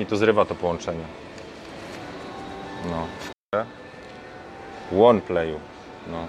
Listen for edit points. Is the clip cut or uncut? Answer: cut